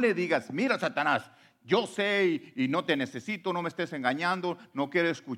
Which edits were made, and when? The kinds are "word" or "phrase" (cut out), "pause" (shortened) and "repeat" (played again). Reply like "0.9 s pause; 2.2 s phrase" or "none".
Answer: none